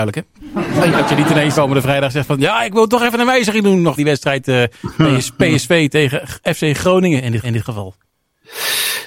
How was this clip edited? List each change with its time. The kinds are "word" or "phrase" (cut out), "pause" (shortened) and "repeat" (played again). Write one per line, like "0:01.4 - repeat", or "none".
0:00.9 - word
0:01.5 - word
0:04.0 - word
0:07.4 - repeat

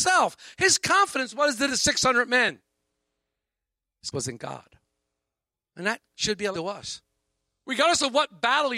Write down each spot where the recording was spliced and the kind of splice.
0:01.7 - word
0:04.1 - word
0:06.5 - word

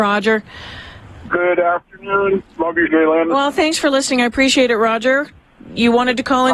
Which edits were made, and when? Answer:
0:02.9 - word

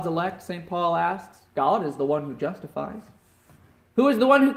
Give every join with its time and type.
none

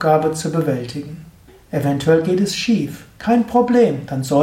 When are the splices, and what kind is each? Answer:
0:01.5 - pause

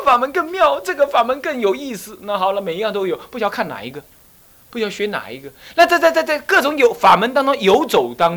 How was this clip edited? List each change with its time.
none

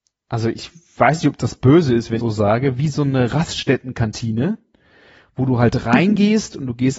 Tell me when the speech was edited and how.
0:02.2 - phrase

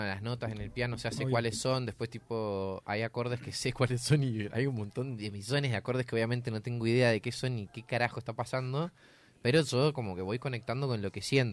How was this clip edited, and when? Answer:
none

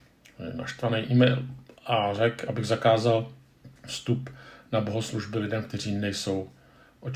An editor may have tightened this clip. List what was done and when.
0:03.8 - pause

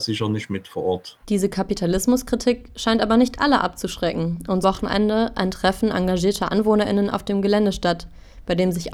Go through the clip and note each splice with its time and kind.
0:01.2 - pause
0:04.6 - phrase

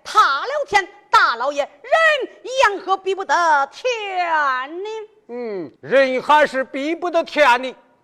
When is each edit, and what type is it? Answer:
0:05.8 - pause

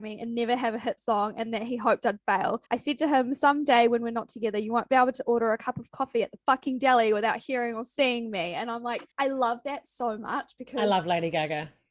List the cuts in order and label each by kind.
0:02.7 - pause
0:09.1 - pause

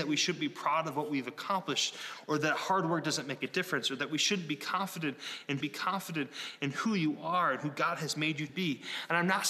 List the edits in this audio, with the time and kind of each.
0:05.6 - repeat
0:08.5 - word

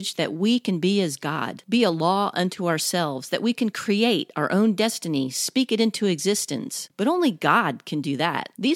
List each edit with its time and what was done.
none

